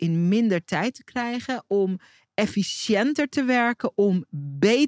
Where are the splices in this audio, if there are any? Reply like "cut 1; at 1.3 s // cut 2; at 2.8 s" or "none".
none